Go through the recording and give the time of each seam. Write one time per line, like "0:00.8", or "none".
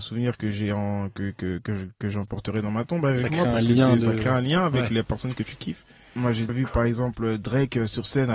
0:01.6
0:06.5